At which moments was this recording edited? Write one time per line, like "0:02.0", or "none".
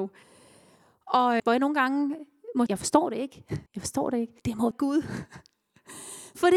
0:01.4
0:02.7
0:03.7
0:04.4
0:04.7